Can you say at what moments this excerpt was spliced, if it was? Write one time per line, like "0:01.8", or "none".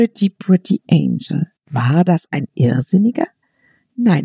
0:01.6